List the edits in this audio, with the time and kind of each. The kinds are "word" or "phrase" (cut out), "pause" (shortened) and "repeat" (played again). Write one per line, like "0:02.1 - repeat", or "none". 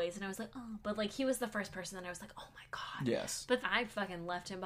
0:03.6 - word